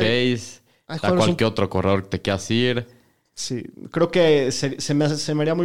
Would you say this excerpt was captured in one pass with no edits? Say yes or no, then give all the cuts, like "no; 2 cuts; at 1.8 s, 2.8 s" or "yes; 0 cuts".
yes; 0 cuts